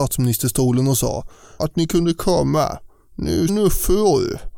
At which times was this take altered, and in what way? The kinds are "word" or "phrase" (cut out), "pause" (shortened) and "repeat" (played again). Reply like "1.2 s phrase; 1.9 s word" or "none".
1.6 s word; 3.5 s phrase